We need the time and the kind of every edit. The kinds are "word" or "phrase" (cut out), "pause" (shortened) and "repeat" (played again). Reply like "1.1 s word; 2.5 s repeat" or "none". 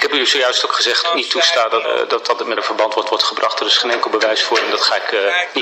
1.0 s phrase; 1.8 s word; 2.5 s word; 3.0 s repeat